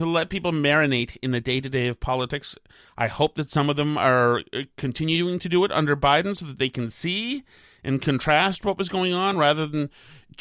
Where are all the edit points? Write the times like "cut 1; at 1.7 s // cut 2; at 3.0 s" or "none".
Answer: none

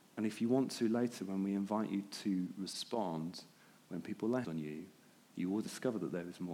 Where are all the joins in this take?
cut 1; at 4.4 s

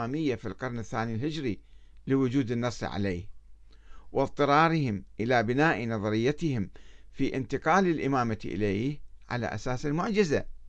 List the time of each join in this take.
none

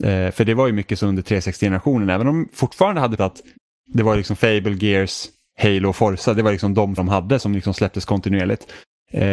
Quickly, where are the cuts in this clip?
cut 1; at 3.2 s // cut 2; at 7.0 s

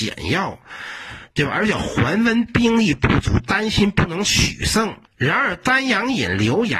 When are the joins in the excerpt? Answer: cut 1; at 5.0 s

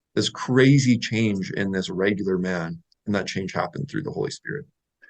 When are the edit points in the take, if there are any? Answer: none

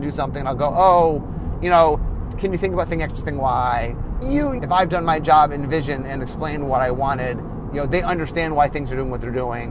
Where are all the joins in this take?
cut 1; at 1.6 s // cut 2; at 4.2 s // cut 3; at 4.6 s

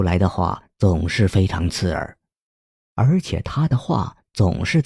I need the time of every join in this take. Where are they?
none

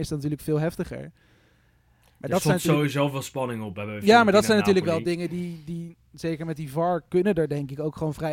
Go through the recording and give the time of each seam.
none

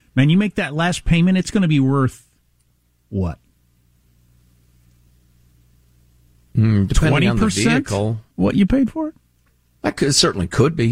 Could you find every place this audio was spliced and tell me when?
cut 1; at 8.3 s

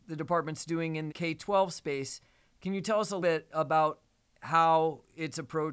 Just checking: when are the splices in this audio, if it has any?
cut 1; at 1.1 s // cut 2; at 3.2 s

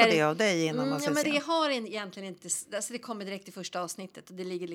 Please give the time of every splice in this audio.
cut 1; at 1.2 s

